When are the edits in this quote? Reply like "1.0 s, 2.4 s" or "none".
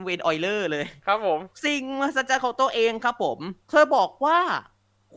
1.5 s, 3.6 s